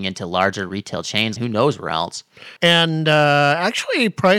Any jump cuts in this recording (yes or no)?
yes